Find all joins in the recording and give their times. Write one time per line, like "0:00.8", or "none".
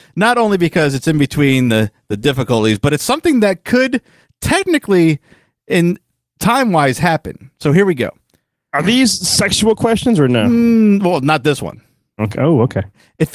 none